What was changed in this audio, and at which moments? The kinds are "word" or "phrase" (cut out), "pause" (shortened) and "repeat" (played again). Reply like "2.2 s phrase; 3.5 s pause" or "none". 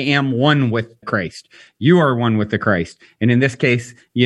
1.0 s word